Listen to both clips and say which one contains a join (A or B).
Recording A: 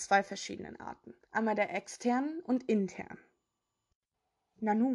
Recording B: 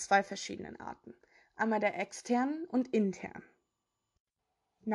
A